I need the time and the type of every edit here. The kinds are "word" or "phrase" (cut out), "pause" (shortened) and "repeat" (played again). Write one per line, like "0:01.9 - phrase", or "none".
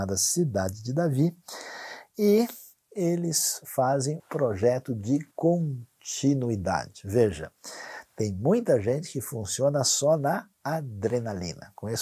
0:04.2 - word
0:05.3 - pause
0:10.5 - pause